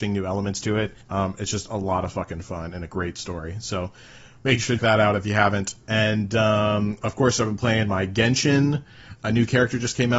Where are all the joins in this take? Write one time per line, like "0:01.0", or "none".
0:01.0
0:04.8